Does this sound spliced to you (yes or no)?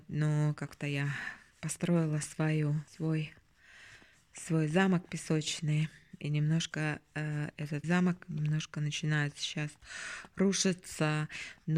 yes